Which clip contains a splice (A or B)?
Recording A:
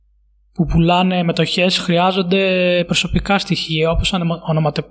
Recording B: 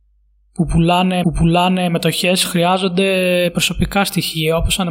B